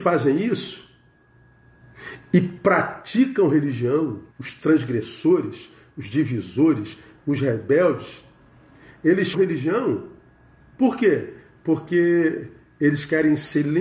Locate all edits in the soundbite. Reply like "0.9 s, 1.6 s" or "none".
4.3 s, 9.3 s